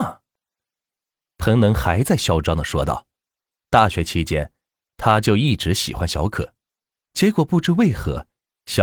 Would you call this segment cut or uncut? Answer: uncut